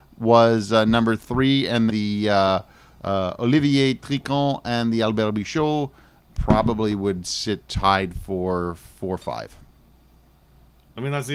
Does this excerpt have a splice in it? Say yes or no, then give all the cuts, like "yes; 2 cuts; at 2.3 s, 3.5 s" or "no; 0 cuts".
yes; 1 cut; at 1.9 s